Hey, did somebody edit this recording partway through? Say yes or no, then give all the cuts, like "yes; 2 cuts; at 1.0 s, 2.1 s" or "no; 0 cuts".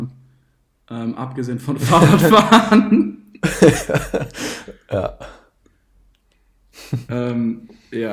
no; 0 cuts